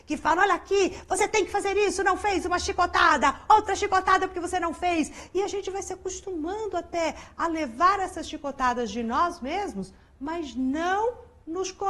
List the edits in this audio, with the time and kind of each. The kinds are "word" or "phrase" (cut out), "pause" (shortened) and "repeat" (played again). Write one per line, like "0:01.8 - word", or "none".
none